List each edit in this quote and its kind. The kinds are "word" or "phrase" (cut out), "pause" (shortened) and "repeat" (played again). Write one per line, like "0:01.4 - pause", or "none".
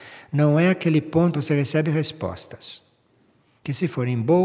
0:01.3 - word